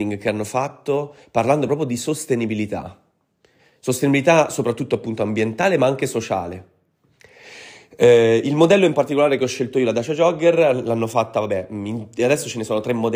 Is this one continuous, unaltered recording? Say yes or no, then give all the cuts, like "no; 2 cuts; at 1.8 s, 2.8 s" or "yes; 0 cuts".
yes; 0 cuts